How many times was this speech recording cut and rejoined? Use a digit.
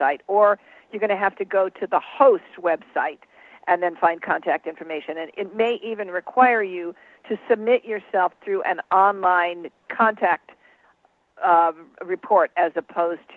1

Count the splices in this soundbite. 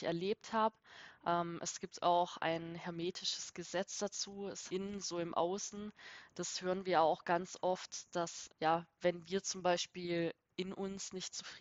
2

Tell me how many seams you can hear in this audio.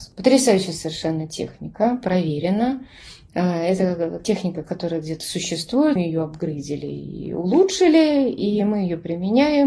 2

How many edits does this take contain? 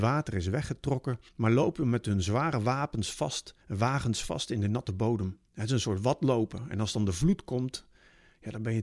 3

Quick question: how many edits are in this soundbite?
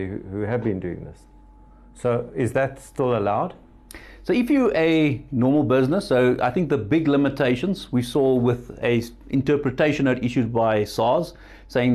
0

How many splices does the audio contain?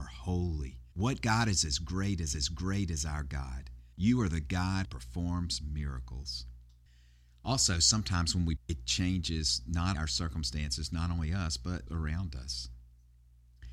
8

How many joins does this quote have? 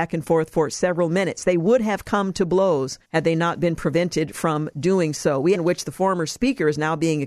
2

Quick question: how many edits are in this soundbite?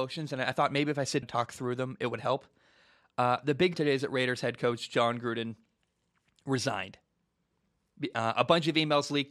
2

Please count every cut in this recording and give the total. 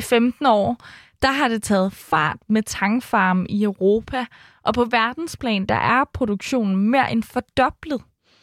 0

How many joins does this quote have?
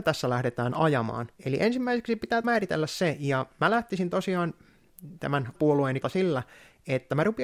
4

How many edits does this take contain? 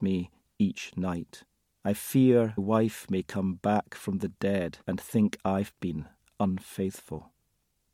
3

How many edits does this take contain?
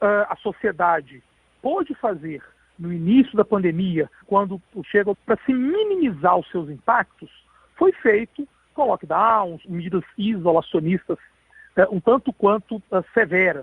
4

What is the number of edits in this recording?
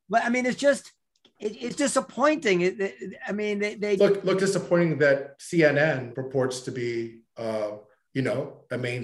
4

